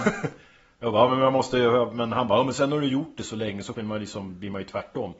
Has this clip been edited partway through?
yes; 1 cut; at 3.7 s

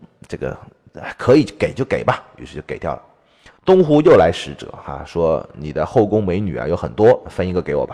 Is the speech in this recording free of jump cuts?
no; 1 cut; at 3.6 s

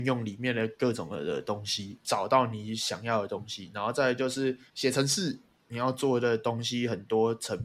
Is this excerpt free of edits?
yes; 0 cuts

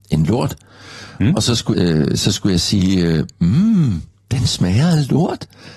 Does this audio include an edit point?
yes; 1 cut; at 1.7 s

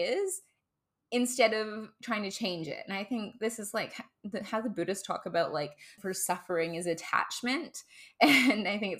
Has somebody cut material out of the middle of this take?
yes; 1 cut; at 6.0 s

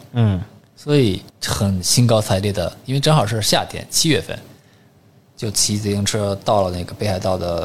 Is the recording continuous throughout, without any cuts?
no; 1 cut; at 1.3 s

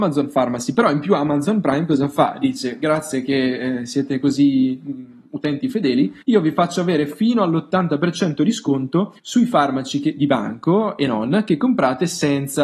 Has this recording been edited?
yes; 2 cuts; at 6.2 s, 9.2 s

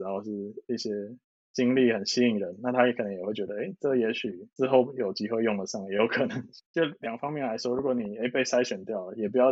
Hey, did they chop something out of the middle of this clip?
no; 0 cuts

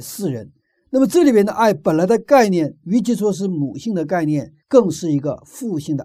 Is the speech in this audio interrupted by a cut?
yes; 1 cut; at 4.6 s

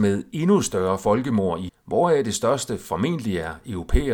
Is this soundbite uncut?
no; 1 cut; at 1.7 s

